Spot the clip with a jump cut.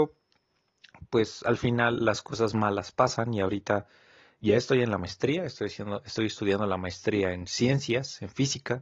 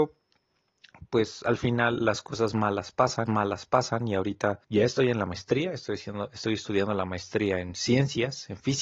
second; 2 cuts; at 3.3 s, 4.6 s

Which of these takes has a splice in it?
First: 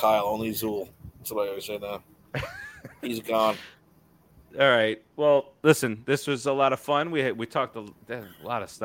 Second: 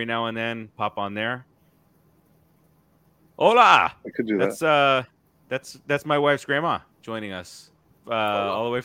second; 1 cut; at 6.9 s

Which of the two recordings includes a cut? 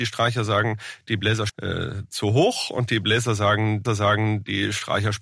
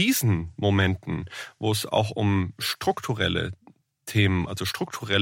first; 2 cuts; at 1.5 s, 3.8 s

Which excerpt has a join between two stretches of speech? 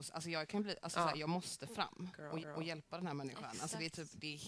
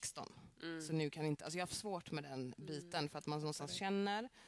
first; 1 cut; at 2.4 s

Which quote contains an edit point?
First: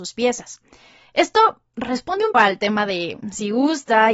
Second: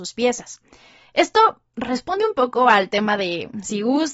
first; 1 cut; at 2.3 s

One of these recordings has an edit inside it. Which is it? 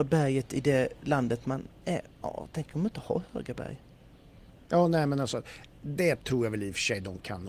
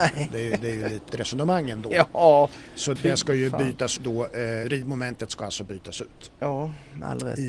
second; 4 cuts; at 1.1 s, 3.0 s, 4.0 s, 4.6 s

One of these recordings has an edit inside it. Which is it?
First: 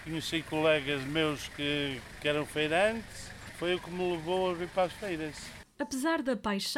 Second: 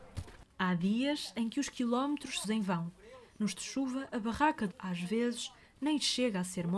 second; 3 cuts; at 2.4 s, 3.5 s, 4.7 s

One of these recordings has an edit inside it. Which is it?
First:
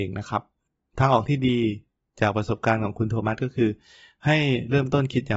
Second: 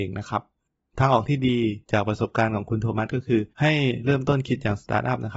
second; 2 cuts; at 1.8 s, 3.5 s

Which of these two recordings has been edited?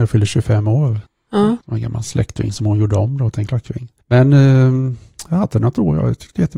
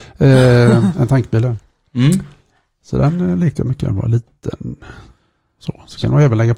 first; 3 cuts; at 1.1 s, 1.6 s, 4.0 s

